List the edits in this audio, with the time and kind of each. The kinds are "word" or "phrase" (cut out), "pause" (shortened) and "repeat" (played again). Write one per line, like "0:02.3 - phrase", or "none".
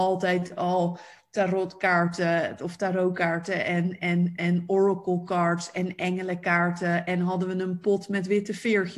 none